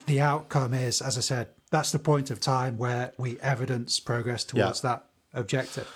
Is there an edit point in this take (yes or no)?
no